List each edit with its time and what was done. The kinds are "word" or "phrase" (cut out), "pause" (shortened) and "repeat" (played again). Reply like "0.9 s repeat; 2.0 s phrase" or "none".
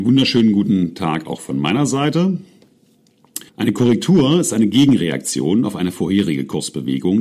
3.5 s pause